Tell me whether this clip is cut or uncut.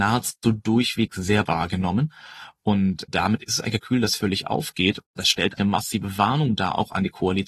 cut